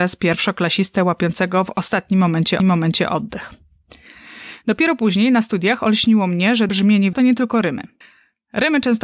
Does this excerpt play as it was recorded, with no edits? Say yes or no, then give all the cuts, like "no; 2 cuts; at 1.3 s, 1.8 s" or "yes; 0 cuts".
no; 4 cuts; at 2.6 s, 6.7 s, 7.1 s, 8.0 s